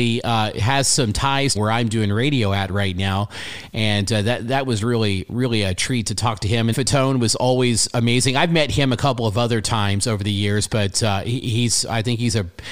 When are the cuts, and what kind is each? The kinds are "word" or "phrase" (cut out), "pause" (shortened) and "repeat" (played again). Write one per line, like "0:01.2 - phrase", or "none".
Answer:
0:01.5 - phrase
0:06.7 - phrase